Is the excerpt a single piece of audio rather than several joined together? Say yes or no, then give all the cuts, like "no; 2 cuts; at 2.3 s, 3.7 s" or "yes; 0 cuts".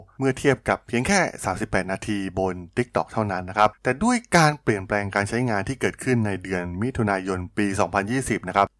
no; 1 cut; at 3.7 s